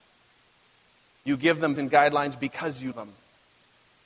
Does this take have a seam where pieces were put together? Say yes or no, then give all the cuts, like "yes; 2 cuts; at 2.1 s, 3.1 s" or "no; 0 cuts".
yes; 2 cuts; at 1.8 s, 2.9 s